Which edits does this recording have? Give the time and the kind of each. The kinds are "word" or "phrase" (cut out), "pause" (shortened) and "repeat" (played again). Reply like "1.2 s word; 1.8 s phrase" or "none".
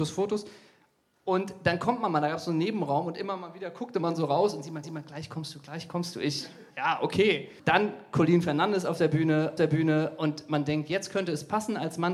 4.8 s repeat; 6.7 s pause; 7.6 s pause; 9.6 s repeat

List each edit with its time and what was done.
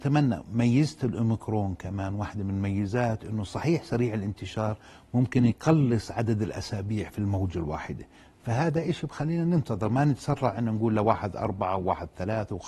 none

